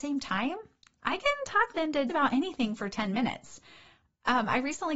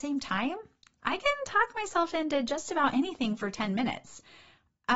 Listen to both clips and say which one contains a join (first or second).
first